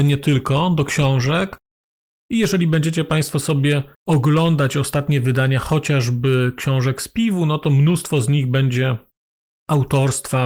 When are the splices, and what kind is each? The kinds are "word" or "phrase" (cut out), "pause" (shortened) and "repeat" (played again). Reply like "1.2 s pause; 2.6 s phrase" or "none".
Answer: 3.9 s pause